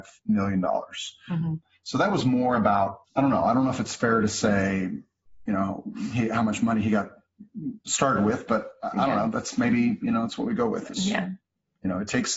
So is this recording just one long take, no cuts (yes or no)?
yes